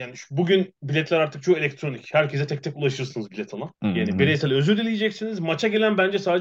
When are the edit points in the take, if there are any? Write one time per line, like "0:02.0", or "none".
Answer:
0:03.7